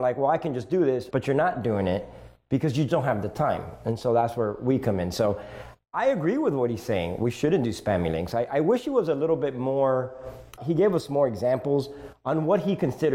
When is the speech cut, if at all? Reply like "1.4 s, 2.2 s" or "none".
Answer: 1.1 s, 2.9 s, 10.6 s